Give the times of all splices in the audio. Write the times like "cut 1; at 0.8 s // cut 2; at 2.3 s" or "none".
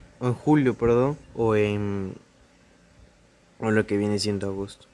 cut 1; at 1.2 s